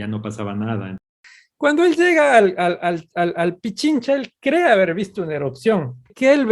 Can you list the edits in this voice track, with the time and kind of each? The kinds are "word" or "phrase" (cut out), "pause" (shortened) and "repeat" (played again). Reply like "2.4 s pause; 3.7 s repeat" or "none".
none